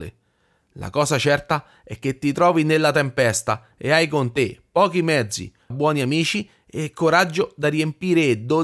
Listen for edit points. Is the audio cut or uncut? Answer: cut